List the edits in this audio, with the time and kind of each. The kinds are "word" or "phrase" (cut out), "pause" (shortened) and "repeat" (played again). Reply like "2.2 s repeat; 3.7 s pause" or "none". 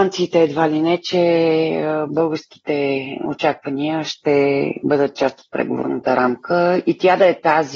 none